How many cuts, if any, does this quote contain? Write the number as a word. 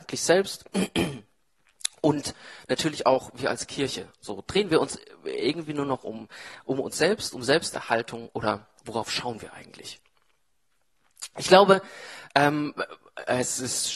one